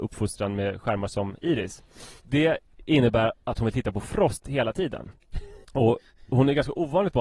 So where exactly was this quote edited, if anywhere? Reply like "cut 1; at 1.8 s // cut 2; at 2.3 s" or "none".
cut 1; at 2.2 s // cut 2; at 5.6 s